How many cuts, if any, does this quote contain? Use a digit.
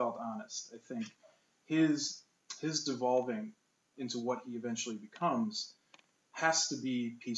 0